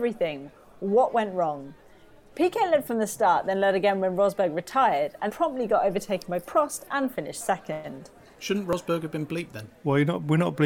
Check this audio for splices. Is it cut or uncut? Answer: cut